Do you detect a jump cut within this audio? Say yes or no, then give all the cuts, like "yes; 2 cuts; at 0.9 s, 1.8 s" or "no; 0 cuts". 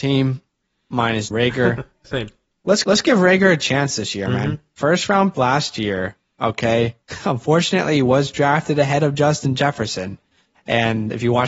yes; 4 cuts; at 1.3 s, 2.0 s, 2.8 s, 5.3 s